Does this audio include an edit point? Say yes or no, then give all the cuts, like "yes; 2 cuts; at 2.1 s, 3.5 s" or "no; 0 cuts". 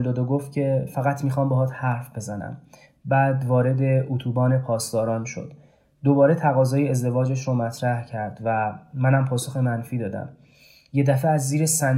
no; 0 cuts